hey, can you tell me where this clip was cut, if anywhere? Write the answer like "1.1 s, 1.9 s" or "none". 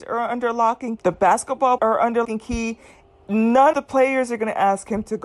1.0 s, 1.8 s, 2.2 s, 3.7 s